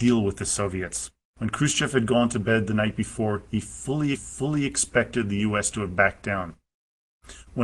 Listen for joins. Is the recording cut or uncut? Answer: cut